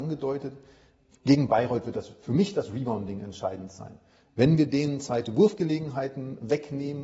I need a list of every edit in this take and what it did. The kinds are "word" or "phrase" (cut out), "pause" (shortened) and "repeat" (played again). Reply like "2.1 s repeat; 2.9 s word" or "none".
none